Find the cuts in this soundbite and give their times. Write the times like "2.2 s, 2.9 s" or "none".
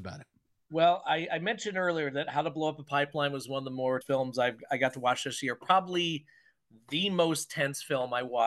4.0 s